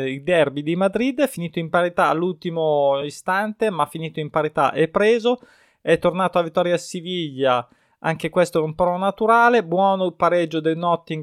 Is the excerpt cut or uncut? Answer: uncut